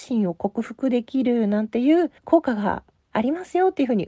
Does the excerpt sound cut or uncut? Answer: cut